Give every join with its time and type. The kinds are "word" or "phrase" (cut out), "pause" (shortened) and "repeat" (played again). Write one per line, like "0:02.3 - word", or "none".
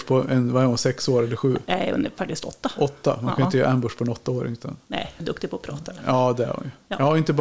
0:05.2 - word